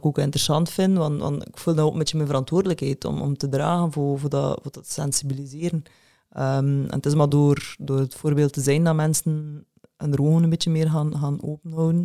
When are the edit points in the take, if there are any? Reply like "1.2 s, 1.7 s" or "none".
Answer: none